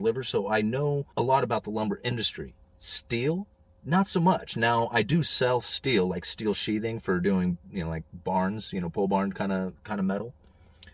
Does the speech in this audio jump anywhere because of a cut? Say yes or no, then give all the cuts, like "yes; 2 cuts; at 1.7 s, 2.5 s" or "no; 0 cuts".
yes; 1 cut; at 1.1 s